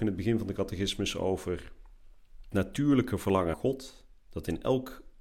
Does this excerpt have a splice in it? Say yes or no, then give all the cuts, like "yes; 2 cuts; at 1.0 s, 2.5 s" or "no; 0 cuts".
yes; 2 cuts; at 2.5 s, 3.5 s